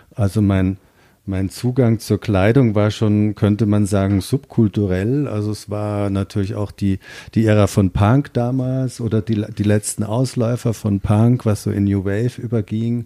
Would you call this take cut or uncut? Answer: uncut